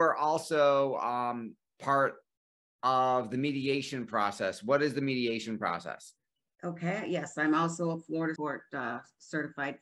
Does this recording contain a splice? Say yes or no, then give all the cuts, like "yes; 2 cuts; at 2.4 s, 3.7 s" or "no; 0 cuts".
yes; 1 cut; at 8.4 s